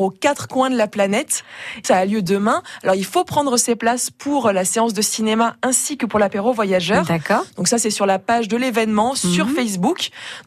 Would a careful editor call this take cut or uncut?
cut